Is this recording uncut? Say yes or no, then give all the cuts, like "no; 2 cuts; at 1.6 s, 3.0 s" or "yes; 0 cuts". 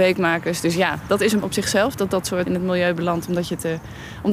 no; 2 cuts; at 1.4 s, 2.5 s